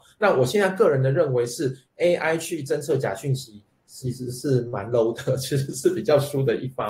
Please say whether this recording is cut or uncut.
uncut